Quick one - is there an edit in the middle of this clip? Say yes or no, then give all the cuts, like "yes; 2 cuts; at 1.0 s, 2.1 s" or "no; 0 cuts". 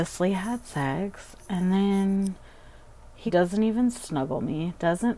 yes; 1 cut; at 3.3 s